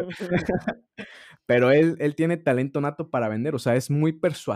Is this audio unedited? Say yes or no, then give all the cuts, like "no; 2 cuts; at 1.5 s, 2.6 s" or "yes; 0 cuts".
yes; 0 cuts